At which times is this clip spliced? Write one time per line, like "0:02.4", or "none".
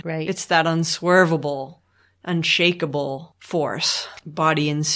none